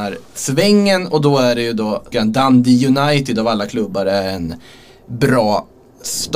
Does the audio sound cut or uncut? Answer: cut